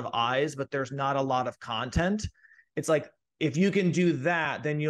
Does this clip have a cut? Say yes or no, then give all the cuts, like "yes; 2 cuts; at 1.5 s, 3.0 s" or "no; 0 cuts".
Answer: no; 0 cuts